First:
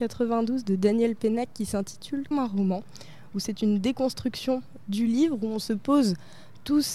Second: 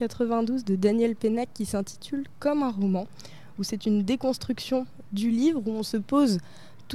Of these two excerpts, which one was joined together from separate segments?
first; 1 cut; at 2.3 s

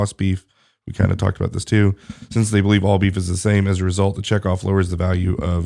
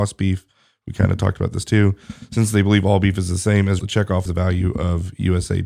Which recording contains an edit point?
second; 2 cuts; at 3.8 s, 4.3 s

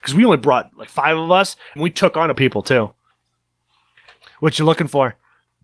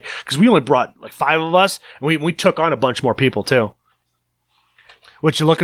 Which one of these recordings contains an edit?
first; 2 cuts; at 1.8 s, 2.3 s

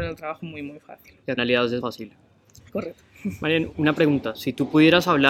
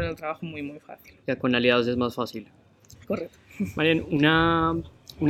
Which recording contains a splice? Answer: first; 3 cuts; at 1.4 s, 1.8 s, 3.7 s

